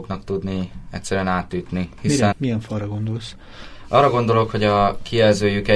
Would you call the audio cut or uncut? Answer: cut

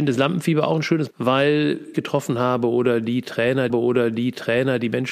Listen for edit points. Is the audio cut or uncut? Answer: cut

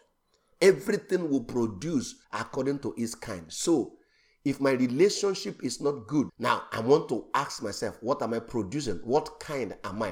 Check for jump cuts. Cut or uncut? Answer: cut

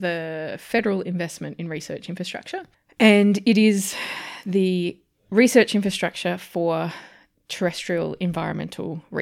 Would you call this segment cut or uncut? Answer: uncut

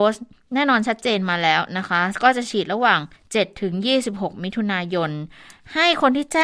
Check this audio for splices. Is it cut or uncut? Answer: cut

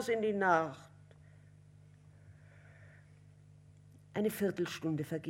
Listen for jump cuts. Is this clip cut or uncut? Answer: uncut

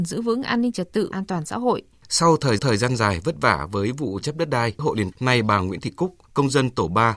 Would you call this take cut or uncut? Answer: cut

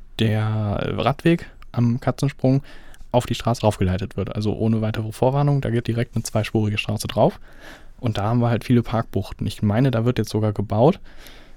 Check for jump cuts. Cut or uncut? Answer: cut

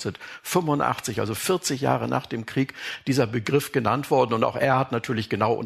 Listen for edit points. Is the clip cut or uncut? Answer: uncut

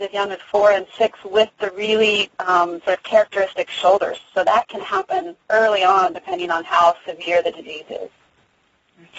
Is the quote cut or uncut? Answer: cut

